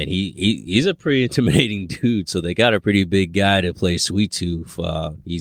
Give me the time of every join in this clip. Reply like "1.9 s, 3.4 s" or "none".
2.8 s